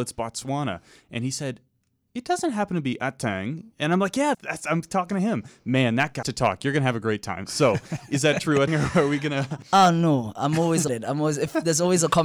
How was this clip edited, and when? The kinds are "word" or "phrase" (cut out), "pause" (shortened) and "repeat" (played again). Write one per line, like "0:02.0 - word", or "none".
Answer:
0:04.3 - word
0:06.2 - word
0:08.7 - word
0:10.9 - word